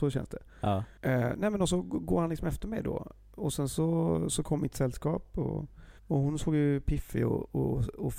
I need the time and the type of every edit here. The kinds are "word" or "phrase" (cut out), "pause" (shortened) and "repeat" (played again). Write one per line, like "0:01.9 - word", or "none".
0:01.7 - word
0:06.0 - pause